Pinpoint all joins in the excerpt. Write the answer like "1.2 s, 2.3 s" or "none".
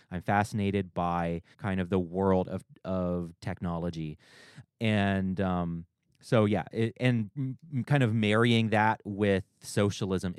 1.5 s